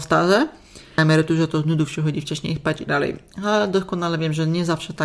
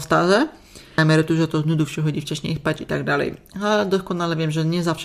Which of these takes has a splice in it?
first; 1 cut; at 2.9 s

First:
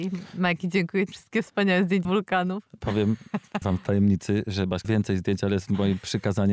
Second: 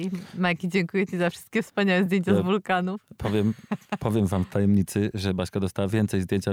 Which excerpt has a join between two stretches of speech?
first; 4 cuts; at 1.1 s, 2.0 s, 3.6 s, 4.8 s

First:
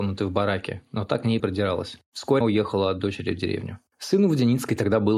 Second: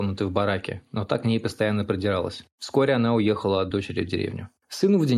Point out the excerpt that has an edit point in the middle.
first; 2 cuts; at 1.4 s, 2.4 s

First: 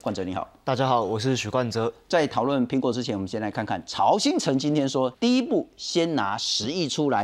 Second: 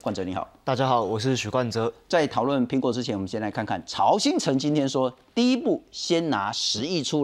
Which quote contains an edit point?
first; 1 cut; at 5.1 s

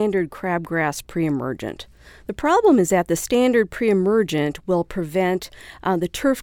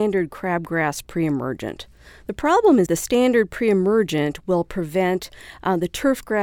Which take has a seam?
second; 1 cut; at 2.9 s

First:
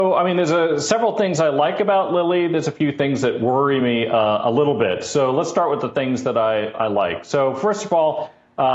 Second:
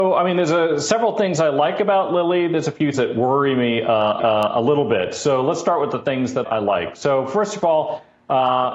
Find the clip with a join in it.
second; 3 cuts; at 2.9 s, 4.2 s, 6.4 s

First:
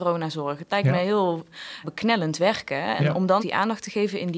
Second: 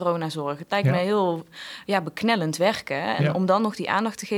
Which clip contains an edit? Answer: first; 2 cuts; at 1.8 s, 3.4 s

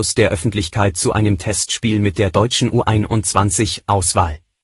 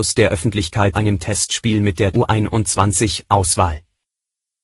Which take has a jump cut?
second; 2 cuts; at 0.9 s, 2.1 s

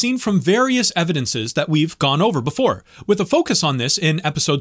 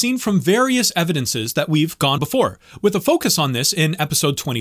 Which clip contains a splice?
second; 1 cut; at 2.2 s

